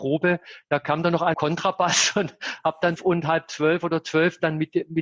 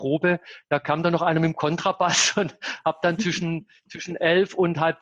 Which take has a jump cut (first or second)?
first